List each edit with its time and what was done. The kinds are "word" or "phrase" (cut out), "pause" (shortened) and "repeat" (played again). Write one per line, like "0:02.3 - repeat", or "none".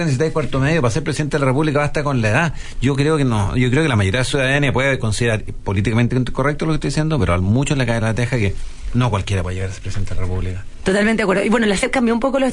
none